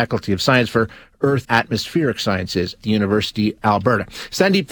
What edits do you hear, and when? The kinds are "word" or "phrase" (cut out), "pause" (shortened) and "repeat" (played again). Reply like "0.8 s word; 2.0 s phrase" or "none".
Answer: 1.4 s word; 2.8 s word; 3.6 s word